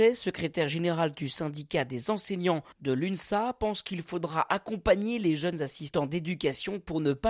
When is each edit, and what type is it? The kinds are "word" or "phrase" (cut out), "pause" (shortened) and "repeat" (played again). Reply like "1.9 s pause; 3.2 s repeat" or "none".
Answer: 2.7 s pause